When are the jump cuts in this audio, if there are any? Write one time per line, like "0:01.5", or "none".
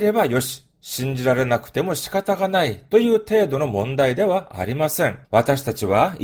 0:05.2

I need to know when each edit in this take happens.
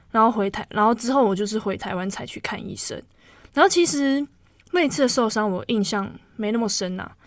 none

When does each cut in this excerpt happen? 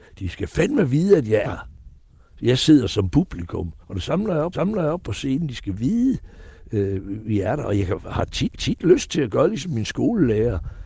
0:01.4
0:03.8
0:04.5
0:08.5

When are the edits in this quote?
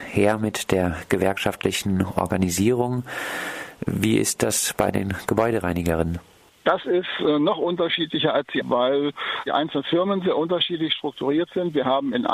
0:08.6

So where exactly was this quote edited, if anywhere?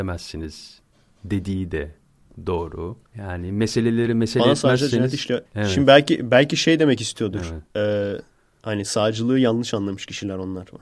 0:03.1
0:05.5
0:07.7

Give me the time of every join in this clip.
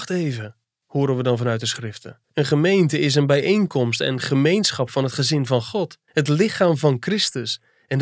0:02.2
0:06.1

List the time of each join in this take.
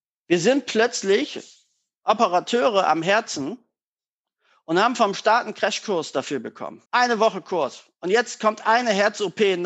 0:06.9

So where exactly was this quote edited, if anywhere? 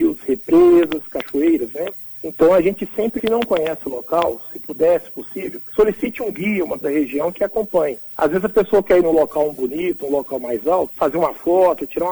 0:03.2
0:06.8

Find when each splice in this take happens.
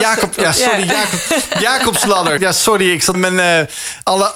0:02.4
0:03.1

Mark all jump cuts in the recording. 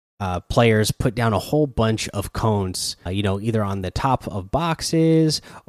0:03.1

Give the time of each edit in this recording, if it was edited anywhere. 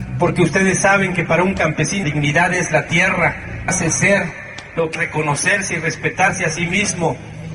0:02.0
0:03.7
0:05.0

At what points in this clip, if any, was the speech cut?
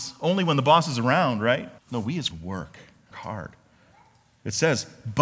0:01.8
0:02.3
0:03.1

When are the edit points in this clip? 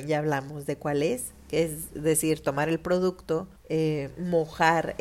0:03.6

